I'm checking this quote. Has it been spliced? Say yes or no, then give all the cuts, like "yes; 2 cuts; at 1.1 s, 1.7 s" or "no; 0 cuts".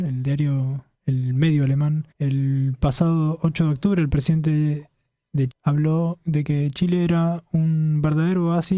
yes; 2 cuts; at 2.1 s, 5.5 s